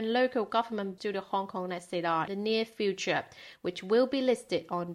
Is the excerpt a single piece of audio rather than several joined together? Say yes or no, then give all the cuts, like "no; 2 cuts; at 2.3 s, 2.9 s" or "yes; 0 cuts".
no; 2 cuts; at 1.0 s, 2.3 s